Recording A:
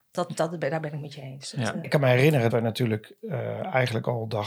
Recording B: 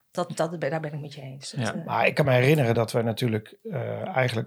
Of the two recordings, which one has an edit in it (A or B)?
A